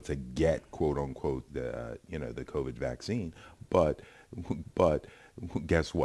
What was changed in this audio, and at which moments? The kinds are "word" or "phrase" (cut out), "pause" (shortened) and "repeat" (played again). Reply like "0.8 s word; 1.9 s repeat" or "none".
1.5 s word; 4.6 s repeat